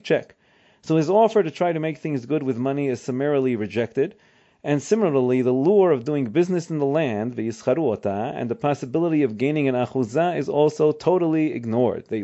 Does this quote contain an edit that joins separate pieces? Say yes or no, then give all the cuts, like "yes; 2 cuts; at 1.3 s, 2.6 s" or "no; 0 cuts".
no; 0 cuts